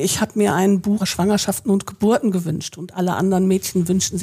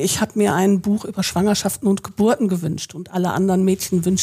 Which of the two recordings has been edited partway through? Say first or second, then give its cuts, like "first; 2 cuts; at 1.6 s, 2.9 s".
first; 1 cut; at 1.0 s